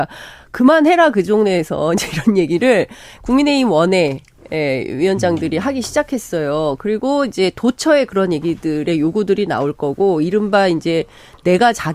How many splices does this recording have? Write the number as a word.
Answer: zero